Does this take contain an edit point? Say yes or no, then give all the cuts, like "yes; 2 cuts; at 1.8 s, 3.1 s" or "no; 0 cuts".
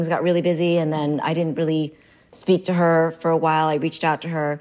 no; 0 cuts